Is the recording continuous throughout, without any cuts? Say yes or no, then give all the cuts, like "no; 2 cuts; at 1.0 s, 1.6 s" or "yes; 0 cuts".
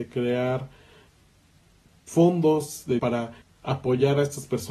no; 2 cuts; at 3.0 s, 3.4 s